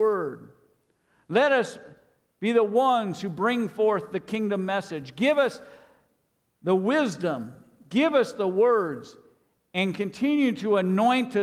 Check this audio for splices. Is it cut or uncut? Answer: uncut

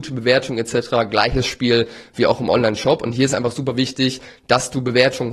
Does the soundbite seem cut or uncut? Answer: uncut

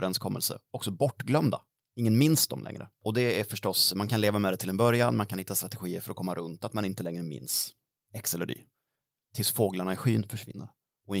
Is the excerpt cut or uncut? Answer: uncut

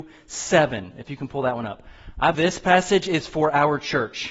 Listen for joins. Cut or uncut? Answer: cut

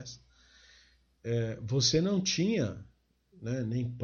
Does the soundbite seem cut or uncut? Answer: uncut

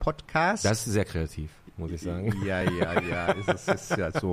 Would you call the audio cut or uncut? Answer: uncut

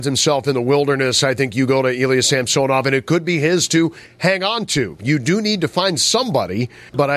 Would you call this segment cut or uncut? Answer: uncut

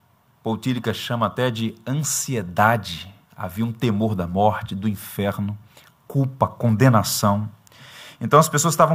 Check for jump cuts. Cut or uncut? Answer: uncut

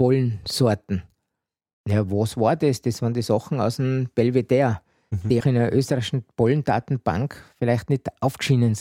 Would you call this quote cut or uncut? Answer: cut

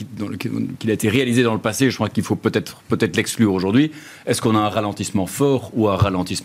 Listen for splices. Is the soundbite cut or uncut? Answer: uncut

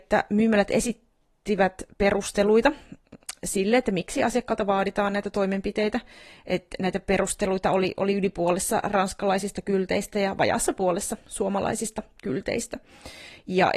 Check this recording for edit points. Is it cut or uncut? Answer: uncut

